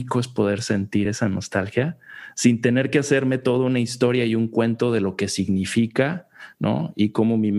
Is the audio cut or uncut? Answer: uncut